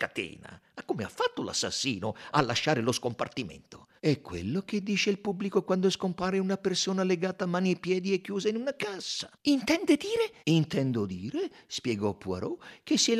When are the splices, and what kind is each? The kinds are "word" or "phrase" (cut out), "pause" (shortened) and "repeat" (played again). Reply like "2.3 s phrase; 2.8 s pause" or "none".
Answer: 4.0 s pause; 9.4 s pause; 10.4 s pause